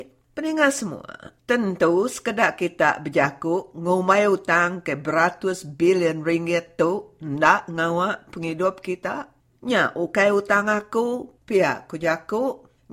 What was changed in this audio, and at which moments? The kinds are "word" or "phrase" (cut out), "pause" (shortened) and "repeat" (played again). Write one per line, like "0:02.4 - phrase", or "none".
none